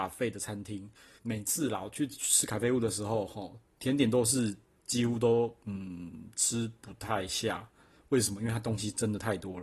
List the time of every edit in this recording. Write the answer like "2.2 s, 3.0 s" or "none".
1.2 s

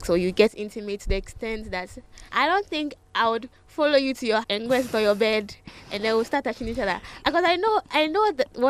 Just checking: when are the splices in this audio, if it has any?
2.3 s, 4.4 s

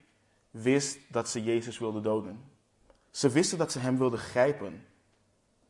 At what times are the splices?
2.7 s

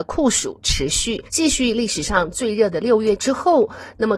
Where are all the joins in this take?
1.3 s

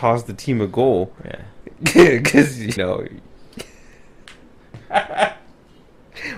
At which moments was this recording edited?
2.8 s

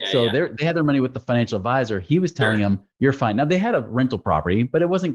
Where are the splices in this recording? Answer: 2.9 s

